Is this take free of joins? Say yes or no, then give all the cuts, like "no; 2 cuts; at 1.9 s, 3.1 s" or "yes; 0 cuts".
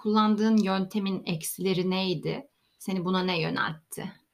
yes; 0 cuts